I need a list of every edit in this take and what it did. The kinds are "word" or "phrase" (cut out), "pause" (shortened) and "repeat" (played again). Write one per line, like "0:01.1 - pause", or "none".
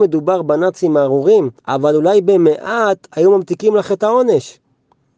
0:01.6 - pause